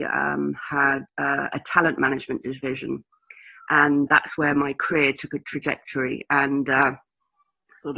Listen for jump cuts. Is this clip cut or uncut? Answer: cut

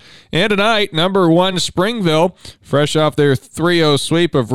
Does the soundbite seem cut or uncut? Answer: uncut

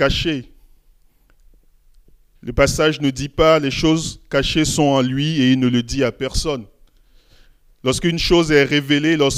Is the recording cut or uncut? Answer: uncut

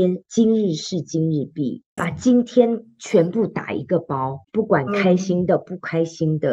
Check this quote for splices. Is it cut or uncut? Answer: cut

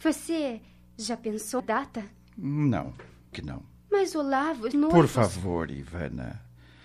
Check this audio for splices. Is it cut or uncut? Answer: cut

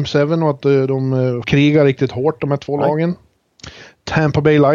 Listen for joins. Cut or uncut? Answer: cut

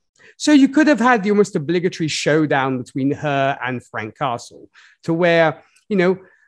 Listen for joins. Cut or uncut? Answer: uncut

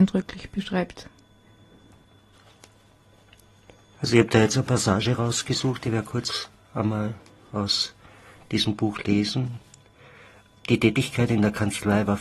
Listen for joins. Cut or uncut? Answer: uncut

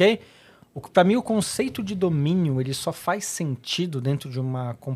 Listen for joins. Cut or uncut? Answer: uncut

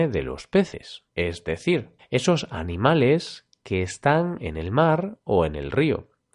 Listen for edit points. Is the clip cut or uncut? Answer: cut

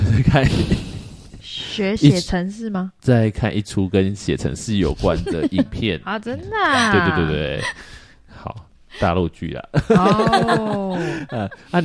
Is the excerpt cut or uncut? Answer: uncut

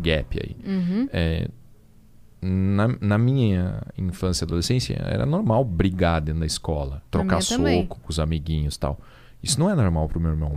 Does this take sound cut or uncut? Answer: cut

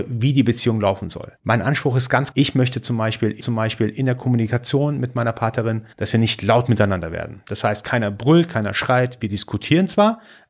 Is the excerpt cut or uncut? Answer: cut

